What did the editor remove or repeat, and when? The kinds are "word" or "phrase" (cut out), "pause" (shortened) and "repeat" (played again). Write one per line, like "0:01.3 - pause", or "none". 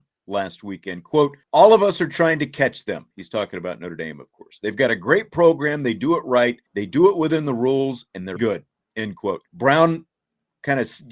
0:01.4 - pause
0:06.7 - pause
0:08.4 - word
0:09.5 - pause